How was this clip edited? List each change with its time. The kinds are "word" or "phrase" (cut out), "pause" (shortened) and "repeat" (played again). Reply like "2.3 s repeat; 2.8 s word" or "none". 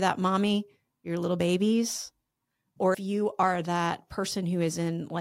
2.9 s word